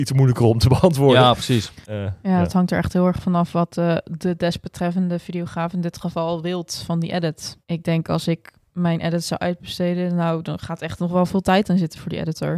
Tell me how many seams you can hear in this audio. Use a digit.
2